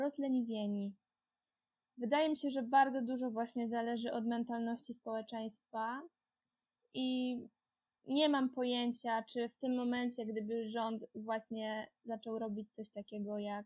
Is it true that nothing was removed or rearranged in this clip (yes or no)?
yes